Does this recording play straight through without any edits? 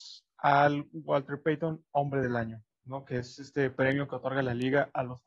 yes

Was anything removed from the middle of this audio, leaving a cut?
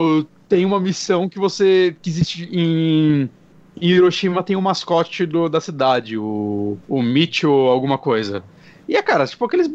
yes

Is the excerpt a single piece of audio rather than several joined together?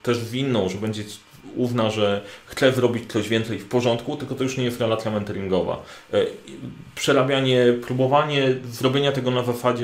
yes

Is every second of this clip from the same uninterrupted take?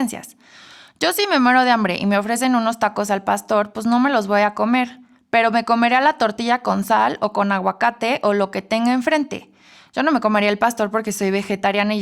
yes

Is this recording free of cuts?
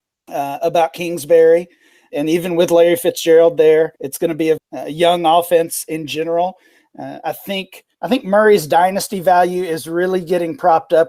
no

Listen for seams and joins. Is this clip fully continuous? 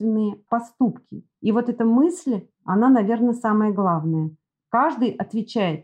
yes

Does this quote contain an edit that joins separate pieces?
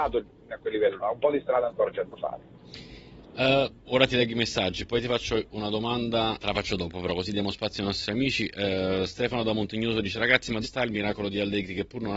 yes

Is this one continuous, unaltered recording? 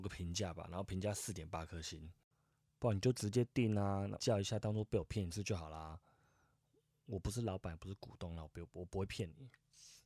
no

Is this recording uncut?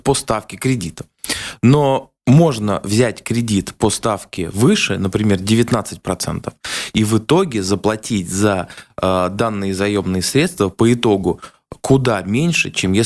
no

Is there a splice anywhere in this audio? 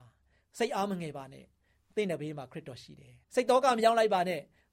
yes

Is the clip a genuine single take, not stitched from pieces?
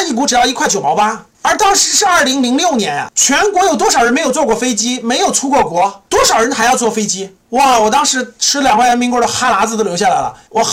yes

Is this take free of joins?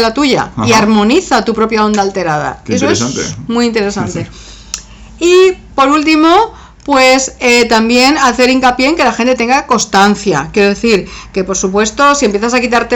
yes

